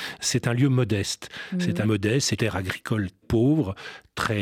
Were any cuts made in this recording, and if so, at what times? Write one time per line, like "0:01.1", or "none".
0:01.8
0:02.4
0:03.2